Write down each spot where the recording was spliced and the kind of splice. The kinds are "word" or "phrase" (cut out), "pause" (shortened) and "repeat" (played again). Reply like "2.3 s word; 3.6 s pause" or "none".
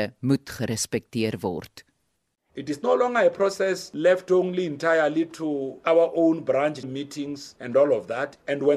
6.8 s word